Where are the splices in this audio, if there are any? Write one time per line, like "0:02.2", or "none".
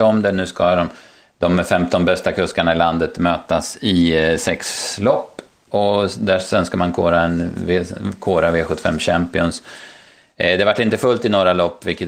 none